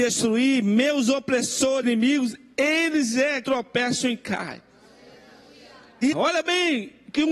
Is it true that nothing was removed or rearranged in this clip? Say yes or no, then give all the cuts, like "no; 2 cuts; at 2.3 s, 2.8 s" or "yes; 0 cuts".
no; 3 cuts; at 1.8 s, 3.4 s, 6.1 s